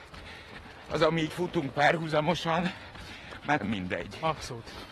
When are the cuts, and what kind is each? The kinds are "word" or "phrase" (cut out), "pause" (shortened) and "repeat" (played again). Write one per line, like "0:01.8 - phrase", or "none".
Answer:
0:01.3 - word
0:03.6 - word